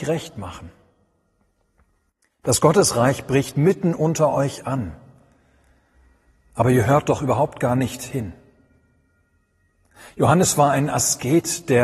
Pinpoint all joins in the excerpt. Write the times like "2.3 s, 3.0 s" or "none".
none